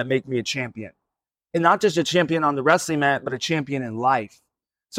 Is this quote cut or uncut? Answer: uncut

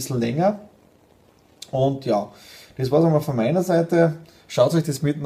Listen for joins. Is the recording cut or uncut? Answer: uncut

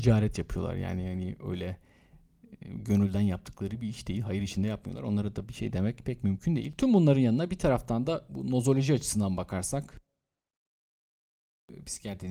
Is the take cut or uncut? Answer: uncut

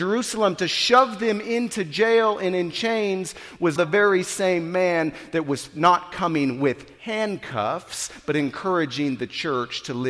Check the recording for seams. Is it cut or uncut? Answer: cut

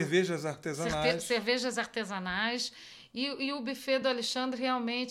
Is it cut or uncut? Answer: uncut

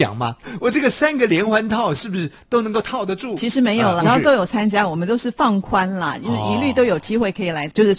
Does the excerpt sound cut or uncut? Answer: cut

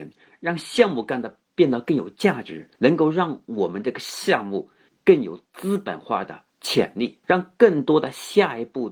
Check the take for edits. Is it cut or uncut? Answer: cut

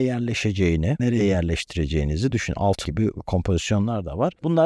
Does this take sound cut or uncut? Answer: cut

